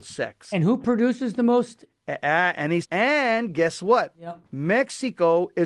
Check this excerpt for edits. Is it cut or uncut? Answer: cut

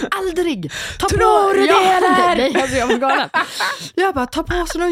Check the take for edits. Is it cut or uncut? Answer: uncut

